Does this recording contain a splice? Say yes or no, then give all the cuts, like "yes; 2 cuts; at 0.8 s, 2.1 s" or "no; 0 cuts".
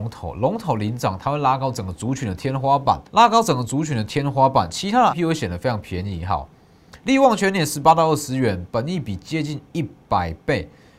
yes; 3 cuts; at 3.1 s, 5.1 s, 7.0 s